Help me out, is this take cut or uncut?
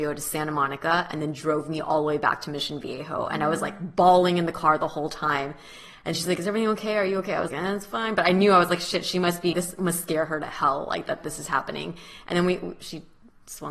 cut